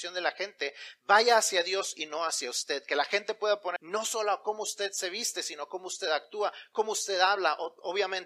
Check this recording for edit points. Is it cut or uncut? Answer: cut